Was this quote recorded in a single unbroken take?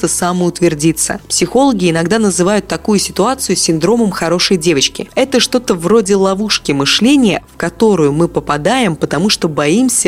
yes; 0 cuts

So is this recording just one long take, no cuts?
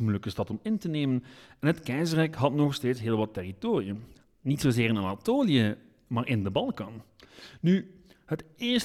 yes; 0 cuts

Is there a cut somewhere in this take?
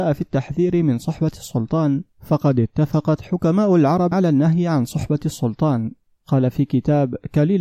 yes; 3 cuts; at 2.1 s, 4.1 s, 6.1 s

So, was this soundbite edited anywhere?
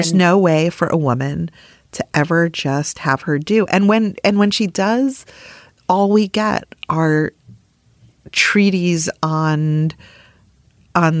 no; 0 cuts

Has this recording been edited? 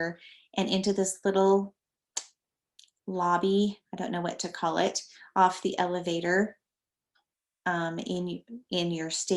no; 0 cuts

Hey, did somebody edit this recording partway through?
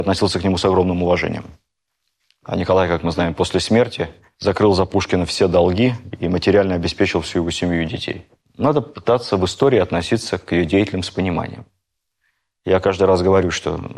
no; 0 cuts

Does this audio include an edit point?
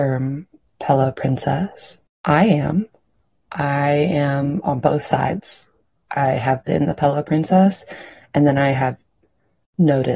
yes; 1 cut; at 2.1 s

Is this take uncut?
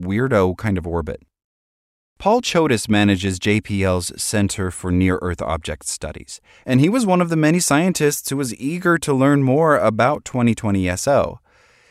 yes; 0 cuts

